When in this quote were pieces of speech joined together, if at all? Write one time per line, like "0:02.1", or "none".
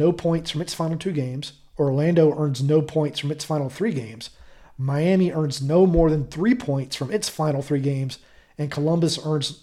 none